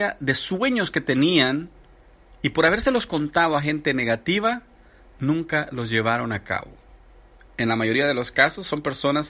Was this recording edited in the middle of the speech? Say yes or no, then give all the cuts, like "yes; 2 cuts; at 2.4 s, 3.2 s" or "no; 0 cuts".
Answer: no; 0 cuts